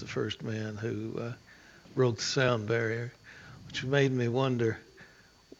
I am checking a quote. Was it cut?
no; 0 cuts

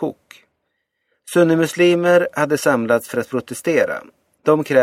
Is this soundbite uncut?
yes; 0 cuts

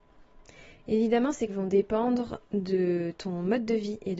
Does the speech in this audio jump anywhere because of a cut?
yes; 1 cut; at 1.5 s

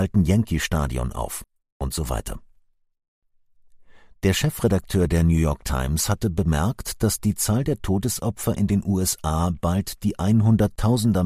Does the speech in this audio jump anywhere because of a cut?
no; 0 cuts

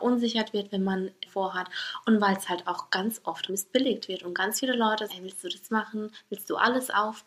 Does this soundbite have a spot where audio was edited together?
yes; 4 cuts; at 1.3 s, 3.5 s, 5.1 s, 5.7 s

